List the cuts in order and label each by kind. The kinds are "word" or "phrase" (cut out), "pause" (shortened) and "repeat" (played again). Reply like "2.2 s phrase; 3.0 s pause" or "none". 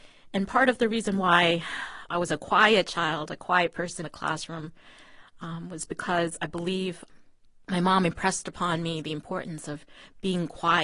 4.0 s word